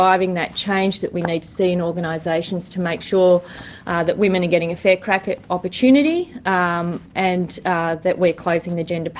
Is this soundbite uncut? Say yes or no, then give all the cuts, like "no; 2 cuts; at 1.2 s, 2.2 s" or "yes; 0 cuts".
yes; 0 cuts